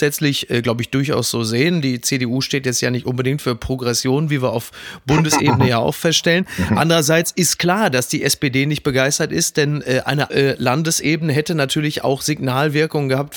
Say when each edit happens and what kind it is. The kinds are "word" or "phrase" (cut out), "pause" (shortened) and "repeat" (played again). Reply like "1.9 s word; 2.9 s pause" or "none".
10.3 s phrase